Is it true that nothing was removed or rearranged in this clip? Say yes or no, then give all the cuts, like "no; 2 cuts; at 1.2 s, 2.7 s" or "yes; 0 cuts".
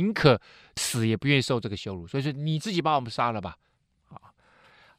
yes; 0 cuts